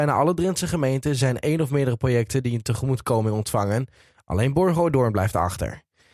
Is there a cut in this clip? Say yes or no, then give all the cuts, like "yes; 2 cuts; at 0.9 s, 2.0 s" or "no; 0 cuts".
no; 0 cuts